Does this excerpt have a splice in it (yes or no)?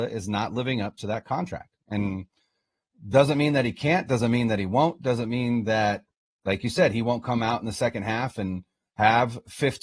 no